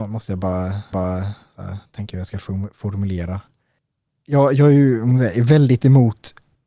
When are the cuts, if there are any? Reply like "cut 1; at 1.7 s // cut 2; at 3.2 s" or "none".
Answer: cut 1; at 0.9 s